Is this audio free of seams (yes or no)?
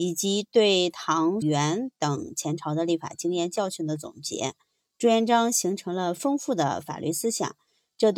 no